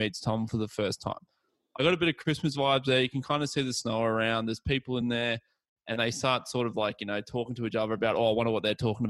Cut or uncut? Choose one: uncut